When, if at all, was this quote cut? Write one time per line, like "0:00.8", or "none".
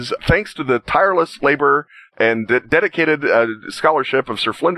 none